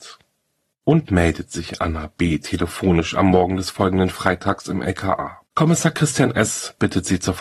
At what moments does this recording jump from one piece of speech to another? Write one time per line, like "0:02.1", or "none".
0:01.1
0:05.5